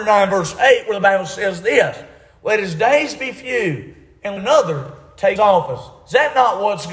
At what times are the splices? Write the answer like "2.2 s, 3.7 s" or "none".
4.4 s, 5.4 s

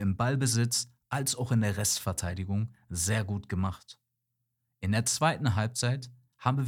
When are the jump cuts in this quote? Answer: none

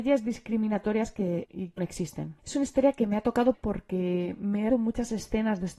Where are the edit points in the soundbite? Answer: 1.5 s, 1.8 s, 2.4 s, 3.5 s, 4.7 s

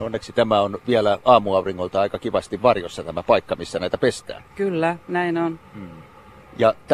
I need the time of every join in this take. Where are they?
none

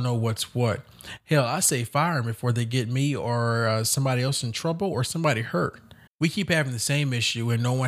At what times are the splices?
6.1 s

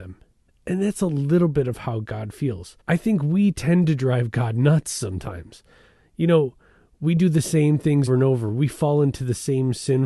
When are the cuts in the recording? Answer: 2.8 s, 8.1 s

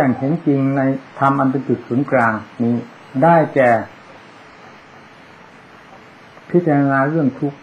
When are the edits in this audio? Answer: 1.1 s

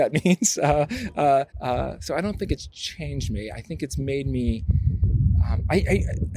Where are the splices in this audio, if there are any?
1.5 s

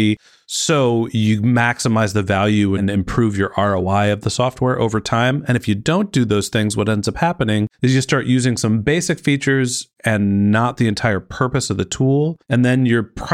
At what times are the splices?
7.7 s, 12.4 s

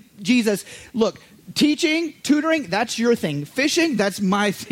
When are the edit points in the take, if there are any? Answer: none

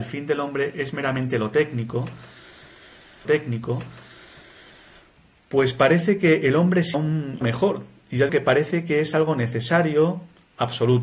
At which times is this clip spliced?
3.2 s, 6.9 s, 7.4 s, 8.3 s

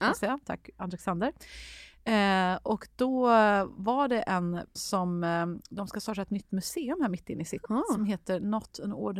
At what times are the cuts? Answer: 4.8 s, 7.7 s

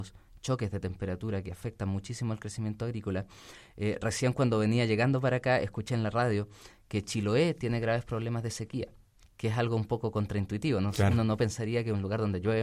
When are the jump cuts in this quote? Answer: none

